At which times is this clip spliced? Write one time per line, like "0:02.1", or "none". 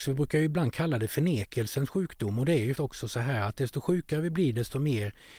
0:02.7